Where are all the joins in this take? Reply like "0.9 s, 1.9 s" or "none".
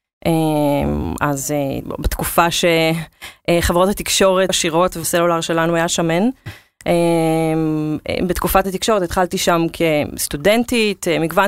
1.8 s, 4.5 s, 5.0 s, 8.6 s